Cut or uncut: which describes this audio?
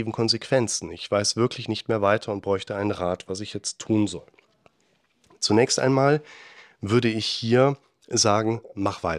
uncut